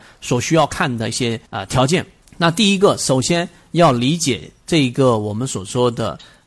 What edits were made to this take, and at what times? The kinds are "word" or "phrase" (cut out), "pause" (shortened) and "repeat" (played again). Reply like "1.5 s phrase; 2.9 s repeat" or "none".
1.5 s pause; 2.2 s pause